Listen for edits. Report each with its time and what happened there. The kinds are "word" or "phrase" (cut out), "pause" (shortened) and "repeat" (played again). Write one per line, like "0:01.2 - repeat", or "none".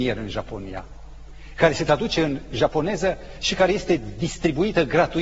none